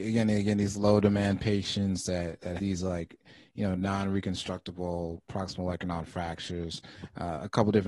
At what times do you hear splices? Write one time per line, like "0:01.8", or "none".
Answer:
0:02.6